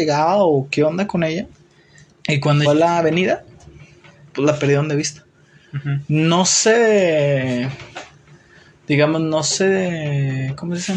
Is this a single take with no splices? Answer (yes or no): no